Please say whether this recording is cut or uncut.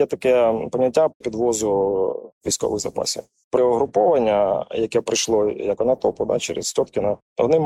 cut